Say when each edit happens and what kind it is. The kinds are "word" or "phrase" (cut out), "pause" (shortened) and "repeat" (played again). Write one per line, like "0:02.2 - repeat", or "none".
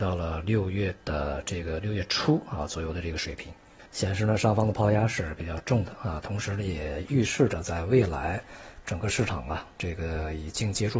0:03.9 - pause